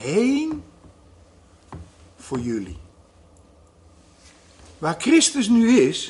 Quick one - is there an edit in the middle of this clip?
no; 0 cuts

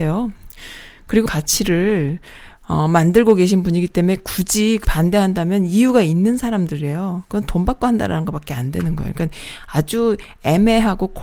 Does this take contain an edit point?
yes; 2 cuts; at 1.3 s, 4.8 s

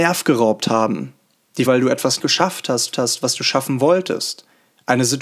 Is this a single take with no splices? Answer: no; 3 cuts; at 1.7 s, 2.2 s, 2.9 s

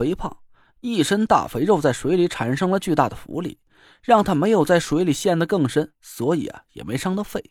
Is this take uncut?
yes; 0 cuts

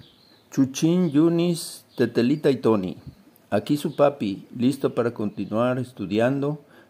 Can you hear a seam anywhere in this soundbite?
no; 0 cuts

